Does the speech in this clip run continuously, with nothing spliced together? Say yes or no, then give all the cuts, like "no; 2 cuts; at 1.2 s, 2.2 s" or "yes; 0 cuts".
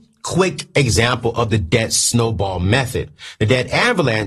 yes; 0 cuts